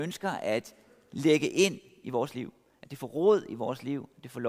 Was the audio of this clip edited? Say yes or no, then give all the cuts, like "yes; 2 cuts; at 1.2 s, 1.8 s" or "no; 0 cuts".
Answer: no; 0 cuts